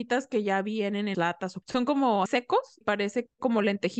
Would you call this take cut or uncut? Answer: cut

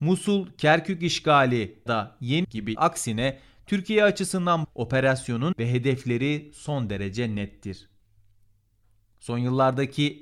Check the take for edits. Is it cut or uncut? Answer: cut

